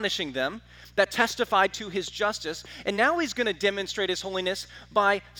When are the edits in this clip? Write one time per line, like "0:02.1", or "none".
none